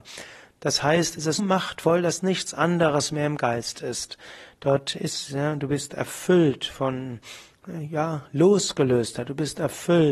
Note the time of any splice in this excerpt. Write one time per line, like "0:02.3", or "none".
0:01.4